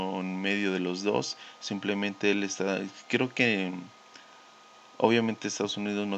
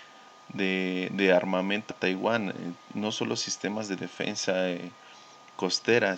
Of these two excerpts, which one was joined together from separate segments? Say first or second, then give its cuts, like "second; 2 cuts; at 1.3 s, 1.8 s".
second; 1 cut; at 1.9 s